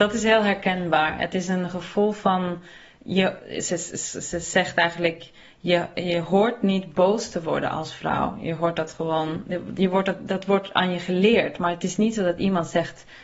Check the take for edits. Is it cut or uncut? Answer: uncut